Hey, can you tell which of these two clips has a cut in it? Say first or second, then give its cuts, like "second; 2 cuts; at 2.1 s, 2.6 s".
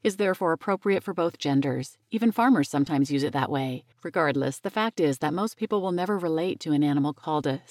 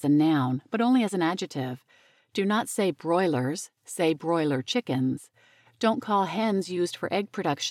first; 1 cut; at 3.9 s